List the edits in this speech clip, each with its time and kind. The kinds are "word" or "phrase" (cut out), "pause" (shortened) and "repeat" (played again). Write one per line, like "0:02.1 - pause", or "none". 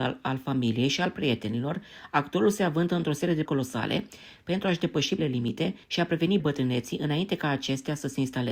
0:03.5 - word
0:05.2 - word
0:05.8 - pause
0:06.4 - word